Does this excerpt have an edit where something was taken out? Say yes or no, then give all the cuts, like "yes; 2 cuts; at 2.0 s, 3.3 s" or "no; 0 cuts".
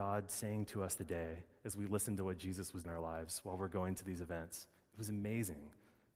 yes; 2 cuts; at 1.0 s, 2.8 s